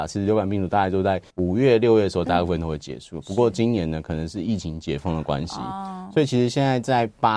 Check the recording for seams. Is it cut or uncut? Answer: cut